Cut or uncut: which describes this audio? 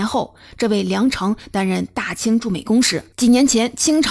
cut